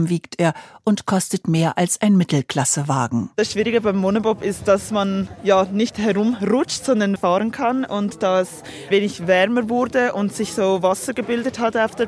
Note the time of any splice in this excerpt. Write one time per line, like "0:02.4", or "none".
0:07.2
0:08.9